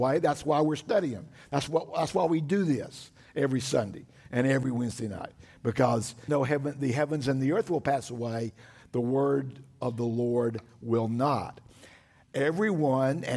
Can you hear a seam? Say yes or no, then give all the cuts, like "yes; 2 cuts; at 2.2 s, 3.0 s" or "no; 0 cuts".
yes; 1 cut; at 6.3 s